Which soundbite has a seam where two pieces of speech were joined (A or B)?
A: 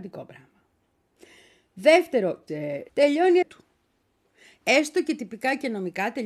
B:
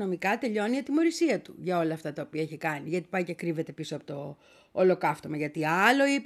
A